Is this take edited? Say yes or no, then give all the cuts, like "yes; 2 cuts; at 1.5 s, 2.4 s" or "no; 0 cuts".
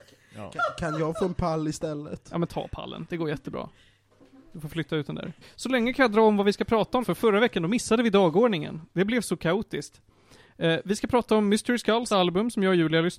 yes; 3 cuts; at 5.4 s, 7.0 s, 12.1 s